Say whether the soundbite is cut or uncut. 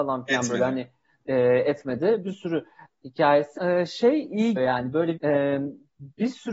cut